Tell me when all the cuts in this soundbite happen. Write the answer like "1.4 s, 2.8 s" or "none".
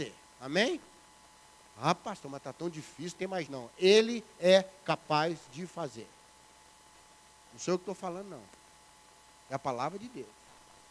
3.1 s, 3.5 s